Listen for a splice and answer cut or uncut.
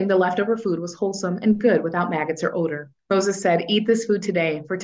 cut